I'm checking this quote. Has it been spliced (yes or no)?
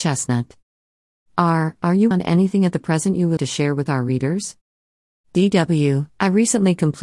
yes